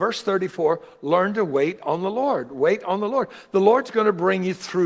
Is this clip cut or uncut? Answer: uncut